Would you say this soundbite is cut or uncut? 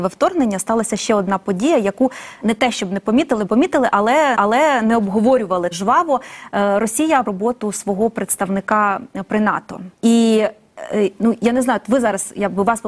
cut